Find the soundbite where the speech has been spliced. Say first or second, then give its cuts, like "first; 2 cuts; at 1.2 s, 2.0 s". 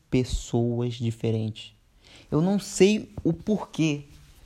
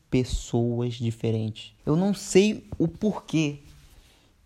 second; 1 cut; at 1.8 s